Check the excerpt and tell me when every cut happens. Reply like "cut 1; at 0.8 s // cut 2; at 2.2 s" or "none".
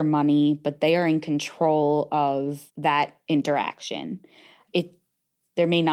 cut 1; at 2.7 s